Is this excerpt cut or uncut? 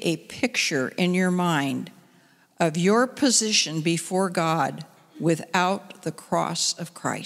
uncut